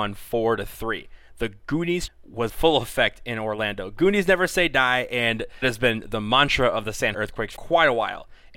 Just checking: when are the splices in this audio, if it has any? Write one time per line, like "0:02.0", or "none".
0:02.1
0:02.5
0:05.6
0:07.1
0:07.6